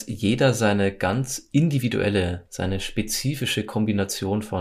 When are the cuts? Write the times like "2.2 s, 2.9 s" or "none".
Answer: none